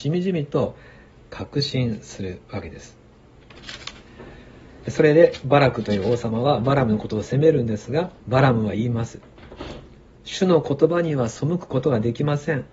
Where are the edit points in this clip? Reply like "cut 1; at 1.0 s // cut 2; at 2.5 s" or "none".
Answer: cut 1; at 8.2 s